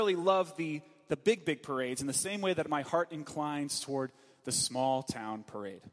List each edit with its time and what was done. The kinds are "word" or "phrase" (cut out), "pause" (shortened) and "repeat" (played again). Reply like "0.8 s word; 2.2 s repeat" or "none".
none